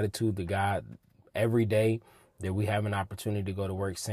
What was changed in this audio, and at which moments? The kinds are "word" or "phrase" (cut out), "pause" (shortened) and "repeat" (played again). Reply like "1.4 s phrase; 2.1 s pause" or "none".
none